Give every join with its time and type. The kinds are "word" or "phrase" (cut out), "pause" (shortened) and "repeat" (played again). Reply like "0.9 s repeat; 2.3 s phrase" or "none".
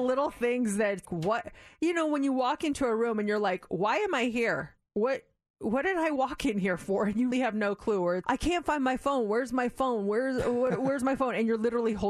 1.0 s word; 7.3 s word; 8.2 s word